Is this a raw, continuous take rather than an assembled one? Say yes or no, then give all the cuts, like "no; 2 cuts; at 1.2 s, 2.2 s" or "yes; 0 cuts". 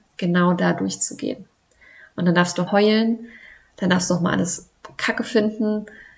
no; 1 cut; at 2.7 s